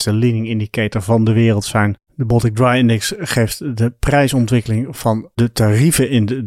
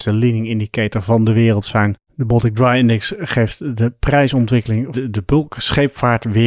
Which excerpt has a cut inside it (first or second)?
second